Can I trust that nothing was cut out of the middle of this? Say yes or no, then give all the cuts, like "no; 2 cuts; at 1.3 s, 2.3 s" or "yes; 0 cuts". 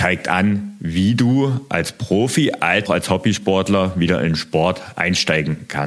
no; 1 cut; at 2.9 s